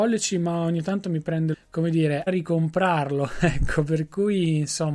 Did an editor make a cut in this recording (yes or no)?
yes